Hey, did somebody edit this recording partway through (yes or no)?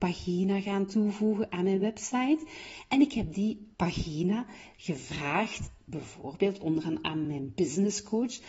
no